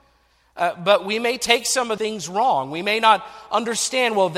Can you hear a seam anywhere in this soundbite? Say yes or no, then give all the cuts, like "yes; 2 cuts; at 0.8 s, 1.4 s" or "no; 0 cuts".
yes; 1 cut; at 2.0 s